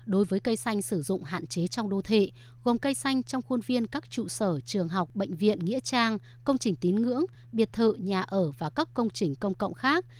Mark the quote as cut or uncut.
uncut